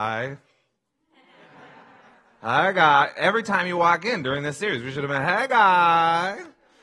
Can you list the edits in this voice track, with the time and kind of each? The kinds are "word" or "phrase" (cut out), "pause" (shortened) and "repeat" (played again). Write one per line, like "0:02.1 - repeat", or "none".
none